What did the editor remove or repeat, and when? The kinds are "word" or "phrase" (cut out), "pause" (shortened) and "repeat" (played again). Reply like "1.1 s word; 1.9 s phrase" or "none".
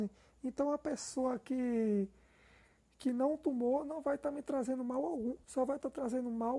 5.4 s pause